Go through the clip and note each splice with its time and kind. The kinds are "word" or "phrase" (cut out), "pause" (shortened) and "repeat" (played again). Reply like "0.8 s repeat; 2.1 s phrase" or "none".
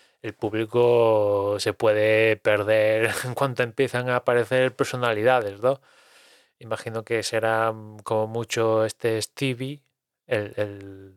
none